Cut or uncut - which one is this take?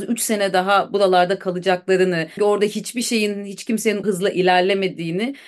cut